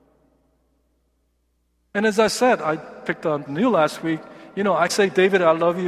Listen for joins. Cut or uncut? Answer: cut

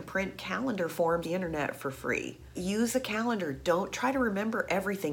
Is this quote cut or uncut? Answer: cut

